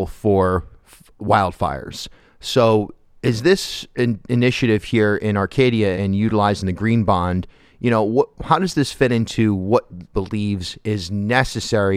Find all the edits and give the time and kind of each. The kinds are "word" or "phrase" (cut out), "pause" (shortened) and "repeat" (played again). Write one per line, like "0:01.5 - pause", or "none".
0:05.9 - word
0:10.1 - word